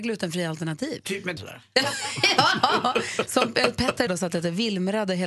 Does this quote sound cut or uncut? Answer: cut